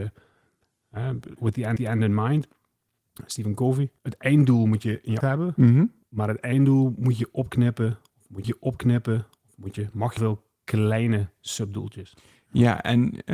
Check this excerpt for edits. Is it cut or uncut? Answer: cut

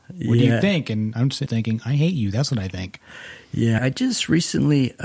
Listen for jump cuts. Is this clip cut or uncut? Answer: cut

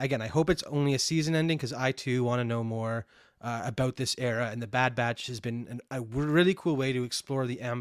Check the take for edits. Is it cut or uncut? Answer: uncut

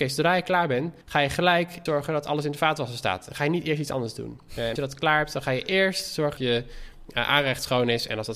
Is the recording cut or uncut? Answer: cut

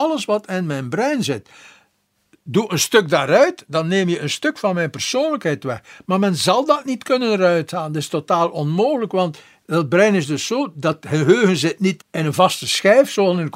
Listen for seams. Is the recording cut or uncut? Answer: cut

